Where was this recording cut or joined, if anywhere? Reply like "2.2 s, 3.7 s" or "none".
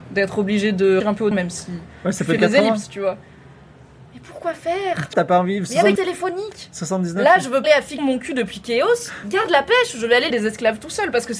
1.0 s, 1.3 s, 2.4 s, 5.1 s, 6.0 s, 7.6 s, 8.0 s, 10.3 s